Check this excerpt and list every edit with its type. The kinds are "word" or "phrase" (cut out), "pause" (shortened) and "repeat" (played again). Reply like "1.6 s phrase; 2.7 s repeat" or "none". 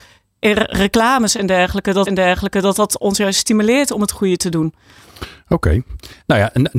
2.1 s repeat